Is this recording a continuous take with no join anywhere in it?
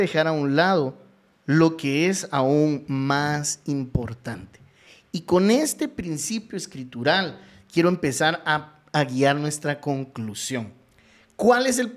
yes; 0 cuts

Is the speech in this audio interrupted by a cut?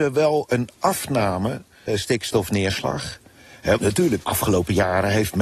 yes; 3 cuts; at 1.9 s, 3.8 s, 4.2 s

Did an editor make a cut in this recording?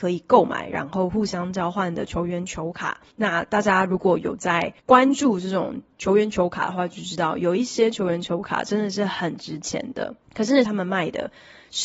yes; 4 cuts; at 3.1 s, 4.8 s, 10.2 s, 10.6 s

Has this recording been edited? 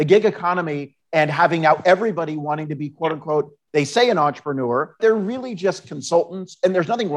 yes; 1 cut; at 5.0 s

